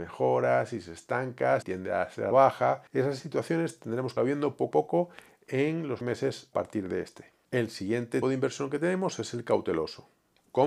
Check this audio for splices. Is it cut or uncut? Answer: cut